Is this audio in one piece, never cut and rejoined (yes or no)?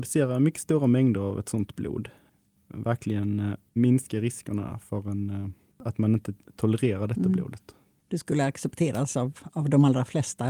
yes